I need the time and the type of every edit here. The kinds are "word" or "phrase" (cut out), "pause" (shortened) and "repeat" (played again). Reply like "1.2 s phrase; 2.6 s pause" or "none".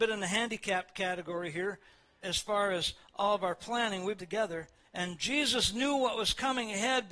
2.2 s word; 4.2 s phrase; 4.8 s pause